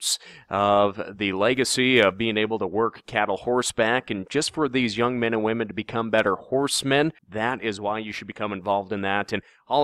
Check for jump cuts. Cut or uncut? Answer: cut